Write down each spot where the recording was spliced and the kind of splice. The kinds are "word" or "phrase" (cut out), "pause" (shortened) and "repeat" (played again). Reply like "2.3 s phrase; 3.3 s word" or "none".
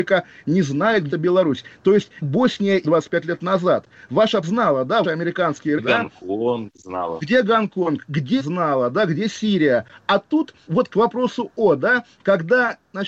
1.1 s word; 2.2 s word; 2.8 s word; 4.4 s word; 5.0 s word; 5.8 s word; 8.4 s word; 10.7 s word